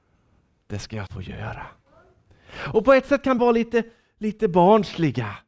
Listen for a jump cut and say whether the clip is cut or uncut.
cut